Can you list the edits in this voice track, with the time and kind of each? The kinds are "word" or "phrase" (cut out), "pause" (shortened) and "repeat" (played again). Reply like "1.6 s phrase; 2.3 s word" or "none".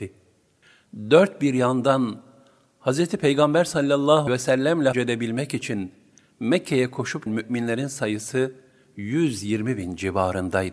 4.3 s word; 4.9 s word; 7.3 s word